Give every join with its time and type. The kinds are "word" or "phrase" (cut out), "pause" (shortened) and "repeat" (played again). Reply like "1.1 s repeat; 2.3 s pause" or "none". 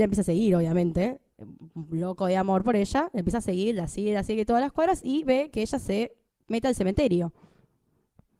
6.3 s pause